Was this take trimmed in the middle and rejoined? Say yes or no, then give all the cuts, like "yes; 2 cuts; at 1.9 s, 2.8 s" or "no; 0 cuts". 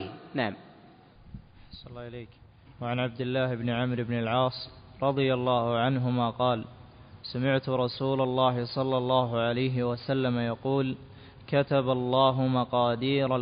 no; 0 cuts